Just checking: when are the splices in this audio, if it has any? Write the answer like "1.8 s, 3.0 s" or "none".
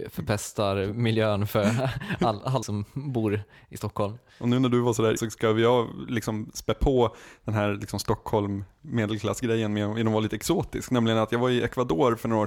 2.6 s, 5.2 s